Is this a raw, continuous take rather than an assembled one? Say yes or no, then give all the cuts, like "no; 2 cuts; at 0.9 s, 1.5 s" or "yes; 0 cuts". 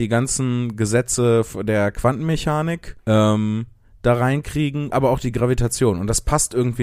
no; 2 cuts; at 3.0 s, 4.9 s